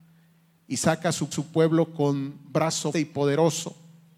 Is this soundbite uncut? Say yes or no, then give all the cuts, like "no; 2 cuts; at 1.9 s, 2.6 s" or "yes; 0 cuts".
no; 2 cuts; at 1.3 s, 2.9 s